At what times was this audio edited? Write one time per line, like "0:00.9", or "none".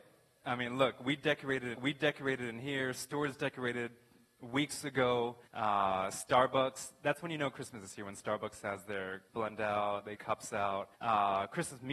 0:01.7
0:05.5
0:09.3
0:10.1
0:10.9